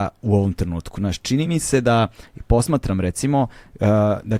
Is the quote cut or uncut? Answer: uncut